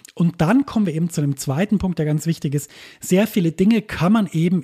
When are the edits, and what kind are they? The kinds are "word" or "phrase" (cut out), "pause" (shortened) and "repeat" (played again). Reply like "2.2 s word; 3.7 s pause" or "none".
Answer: none